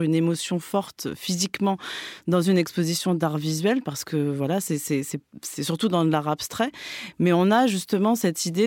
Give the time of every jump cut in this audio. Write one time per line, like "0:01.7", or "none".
none